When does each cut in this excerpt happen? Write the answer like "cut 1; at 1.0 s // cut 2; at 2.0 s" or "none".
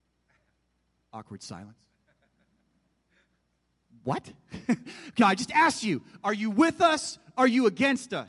cut 1; at 5.2 s